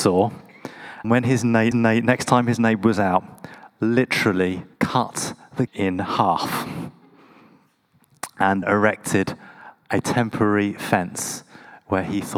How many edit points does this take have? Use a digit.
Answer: 5